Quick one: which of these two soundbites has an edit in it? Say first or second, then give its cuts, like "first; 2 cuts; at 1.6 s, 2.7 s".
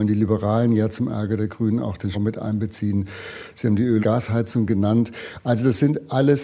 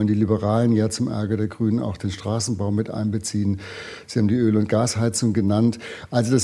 first; 2 cuts; at 2.1 s, 4.0 s